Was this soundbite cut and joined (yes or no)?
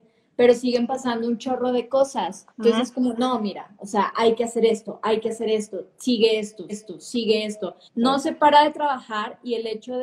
yes